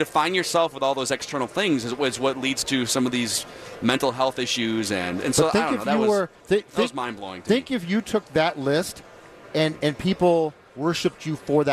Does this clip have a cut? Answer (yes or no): yes